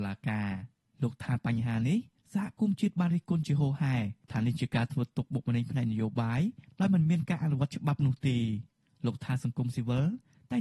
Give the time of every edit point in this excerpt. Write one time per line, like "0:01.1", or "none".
none